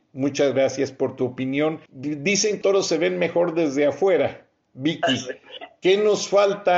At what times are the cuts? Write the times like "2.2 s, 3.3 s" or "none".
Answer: 1.9 s, 2.6 s